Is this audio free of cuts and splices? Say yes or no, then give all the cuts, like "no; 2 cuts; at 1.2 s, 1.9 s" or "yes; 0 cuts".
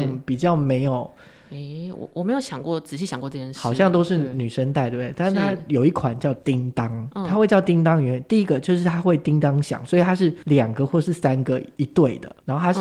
yes; 0 cuts